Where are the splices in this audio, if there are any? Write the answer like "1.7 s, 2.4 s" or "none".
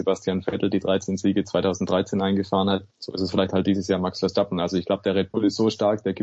2.9 s

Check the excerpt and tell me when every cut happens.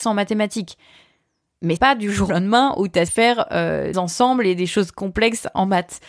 1.8 s, 2.3 s, 3.1 s, 3.9 s

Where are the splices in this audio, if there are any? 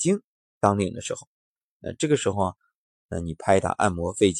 none

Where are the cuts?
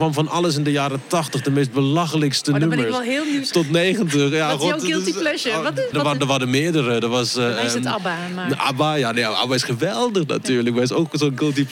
3.5 s, 5.9 s

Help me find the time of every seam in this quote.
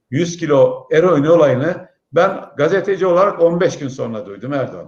none

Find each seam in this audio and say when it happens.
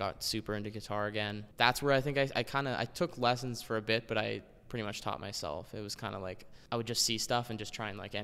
none

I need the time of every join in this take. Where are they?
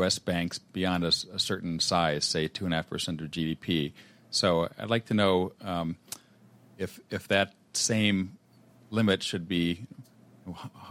none

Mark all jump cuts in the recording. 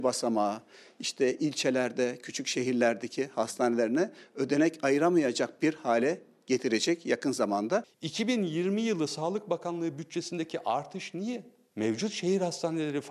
none

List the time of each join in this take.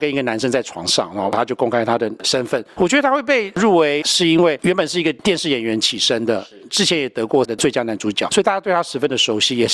4.0 s, 7.4 s

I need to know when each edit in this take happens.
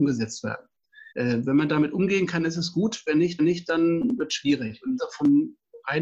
1.1 s, 3.4 s, 5.0 s

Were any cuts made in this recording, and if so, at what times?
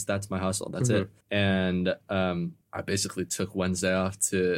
1.2 s, 2.6 s

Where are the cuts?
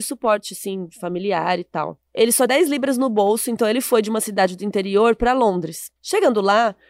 2.1 s, 2.5 s, 6.0 s

